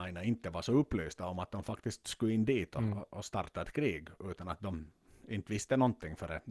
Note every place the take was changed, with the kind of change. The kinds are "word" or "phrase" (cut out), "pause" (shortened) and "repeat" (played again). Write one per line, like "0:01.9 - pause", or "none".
none